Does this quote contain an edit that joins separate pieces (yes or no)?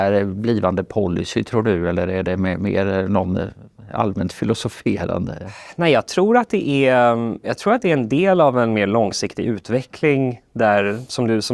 no